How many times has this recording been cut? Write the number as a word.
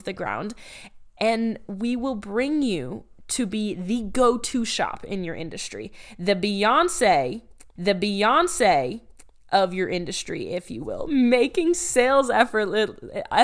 one